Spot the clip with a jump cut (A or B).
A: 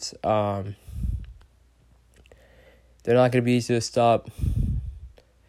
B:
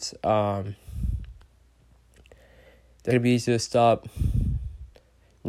B